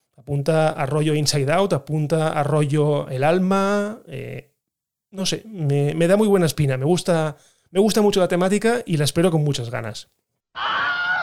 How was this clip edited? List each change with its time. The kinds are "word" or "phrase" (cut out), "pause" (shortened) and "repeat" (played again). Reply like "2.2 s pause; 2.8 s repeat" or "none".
none